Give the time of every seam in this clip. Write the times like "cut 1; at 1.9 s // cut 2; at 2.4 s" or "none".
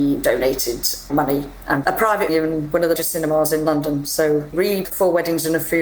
cut 1; at 1.1 s // cut 2; at 1.8 s // cut 3; at 2.3 s // cut 4; at 3.0 s // cut 5; at 4.5 s // cut 6; at 4.8 s